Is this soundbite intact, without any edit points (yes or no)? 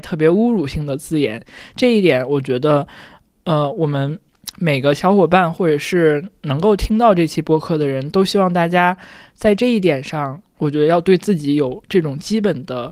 yes